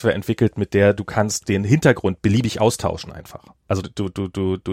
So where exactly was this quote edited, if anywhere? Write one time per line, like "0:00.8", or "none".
0:03.8